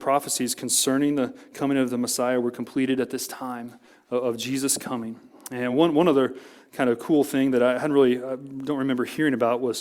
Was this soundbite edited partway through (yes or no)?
no